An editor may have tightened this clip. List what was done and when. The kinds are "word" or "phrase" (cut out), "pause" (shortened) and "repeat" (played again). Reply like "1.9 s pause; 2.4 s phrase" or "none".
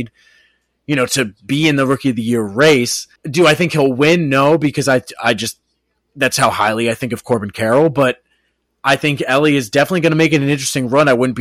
3.2 s pause